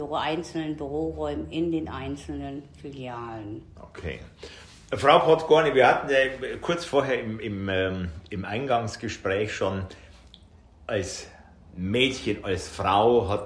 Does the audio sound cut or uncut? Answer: uncut